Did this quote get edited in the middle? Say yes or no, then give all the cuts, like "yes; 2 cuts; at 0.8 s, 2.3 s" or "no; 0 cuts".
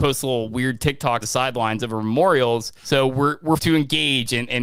yes; 3 cuts; at 1.2 s, 2.8 s, 3.6 s